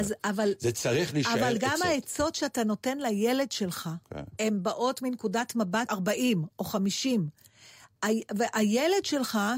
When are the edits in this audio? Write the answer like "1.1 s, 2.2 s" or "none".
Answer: 5.9 s